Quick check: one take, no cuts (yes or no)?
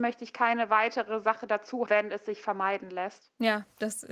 no